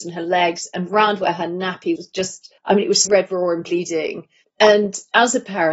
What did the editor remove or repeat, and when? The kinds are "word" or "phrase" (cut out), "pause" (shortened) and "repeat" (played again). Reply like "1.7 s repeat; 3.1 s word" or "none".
2.0 s word; 2.6 s pause; 3.0 s word; 4.4 s pause